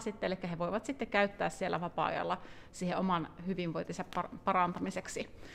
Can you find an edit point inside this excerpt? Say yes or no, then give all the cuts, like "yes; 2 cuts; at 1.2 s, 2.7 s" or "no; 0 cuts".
no; 0 cuts